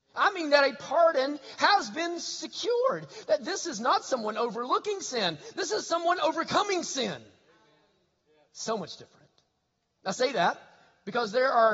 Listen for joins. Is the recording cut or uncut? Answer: uncut